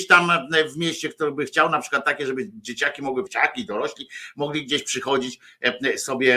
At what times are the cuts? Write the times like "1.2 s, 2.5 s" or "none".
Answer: 3.3 s